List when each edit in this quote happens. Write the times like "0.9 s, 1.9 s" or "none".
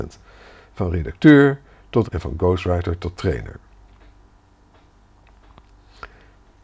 2.1 s